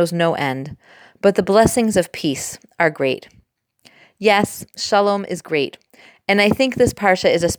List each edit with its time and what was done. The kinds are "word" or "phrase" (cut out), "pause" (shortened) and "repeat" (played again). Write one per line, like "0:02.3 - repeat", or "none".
none